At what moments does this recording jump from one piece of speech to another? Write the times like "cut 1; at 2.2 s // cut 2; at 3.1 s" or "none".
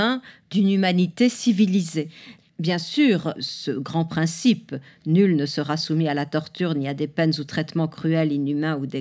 none